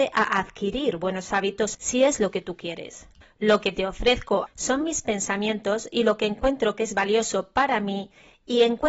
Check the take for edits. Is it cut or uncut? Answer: cut